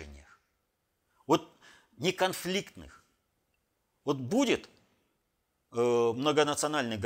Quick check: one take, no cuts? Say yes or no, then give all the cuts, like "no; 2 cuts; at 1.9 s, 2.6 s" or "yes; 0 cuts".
yes; 0 cuts